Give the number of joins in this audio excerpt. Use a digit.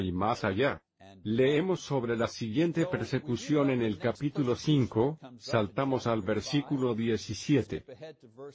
0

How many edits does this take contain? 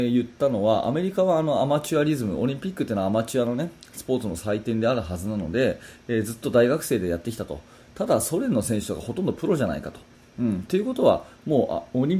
0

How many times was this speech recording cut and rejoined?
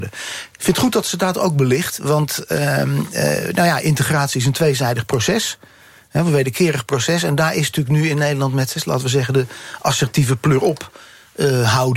0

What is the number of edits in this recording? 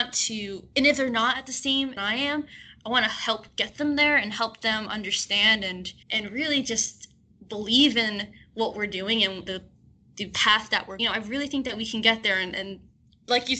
4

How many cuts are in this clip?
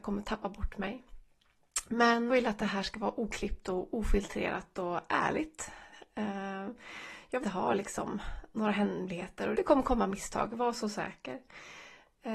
3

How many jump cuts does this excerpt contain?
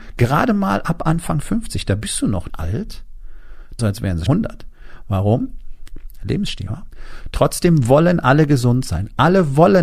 4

